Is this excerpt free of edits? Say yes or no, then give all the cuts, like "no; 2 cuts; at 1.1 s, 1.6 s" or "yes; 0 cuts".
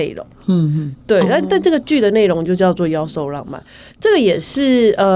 yes; 0 cuts